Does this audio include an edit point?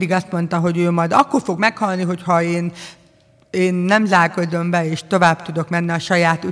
no; 0 cuts

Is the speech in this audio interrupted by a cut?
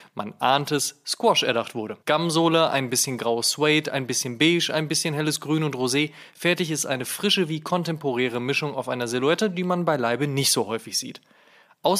yes; 1 cut; at 2.0 s

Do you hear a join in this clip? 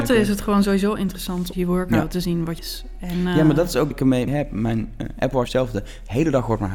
yes; 5 cuts; at 1.5 s, 2.6 s, 3.9 s, 4.3 s, 5.5 s

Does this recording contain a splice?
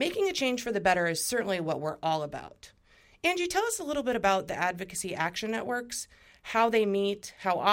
no; 0 cuts

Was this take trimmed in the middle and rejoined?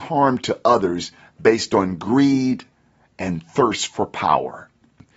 no; 0 cuts

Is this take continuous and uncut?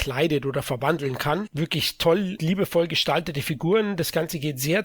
no; 1 cut; at 2.4 s

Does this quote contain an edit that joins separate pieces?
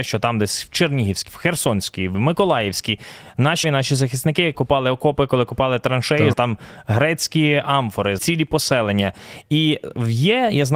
yes; 6 cuts; at 1.3 s, 2.1 s, 3.6 s, 4.5 s, 6.3 s, 8.2 s

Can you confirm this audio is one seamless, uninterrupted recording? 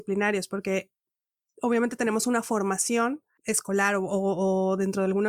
yes; 0 cuts

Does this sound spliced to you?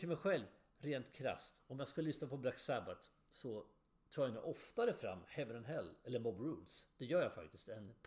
no; 0 cuts

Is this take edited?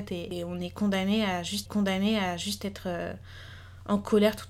yes; 1 cut; at 1.7 s

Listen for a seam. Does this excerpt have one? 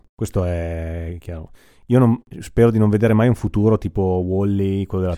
yes; 1 cut; at 2.3 s

